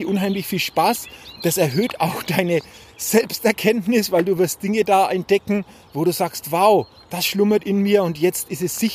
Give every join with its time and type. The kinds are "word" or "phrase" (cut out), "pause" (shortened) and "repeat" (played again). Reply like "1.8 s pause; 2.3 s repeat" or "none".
none